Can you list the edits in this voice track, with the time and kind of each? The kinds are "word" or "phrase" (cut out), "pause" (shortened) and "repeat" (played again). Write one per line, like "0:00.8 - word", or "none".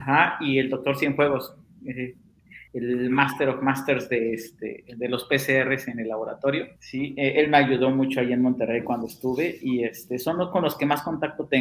0:02.7 - pause
0:06.8 - pause